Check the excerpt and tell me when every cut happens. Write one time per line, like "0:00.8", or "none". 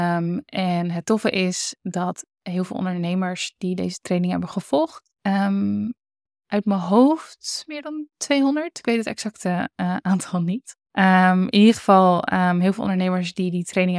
0:05.2
0:10.9